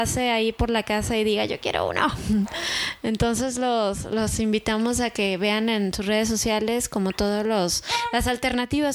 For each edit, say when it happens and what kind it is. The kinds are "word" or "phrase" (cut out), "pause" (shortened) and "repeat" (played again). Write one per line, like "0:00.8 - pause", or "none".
none